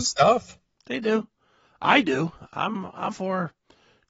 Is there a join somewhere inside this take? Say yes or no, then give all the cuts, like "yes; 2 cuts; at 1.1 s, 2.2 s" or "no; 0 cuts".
yes; 1 cut; at 3.1 s